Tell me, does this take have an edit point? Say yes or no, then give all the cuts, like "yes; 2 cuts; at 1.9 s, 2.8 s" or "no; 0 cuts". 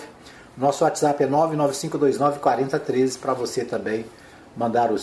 no; 0 cuts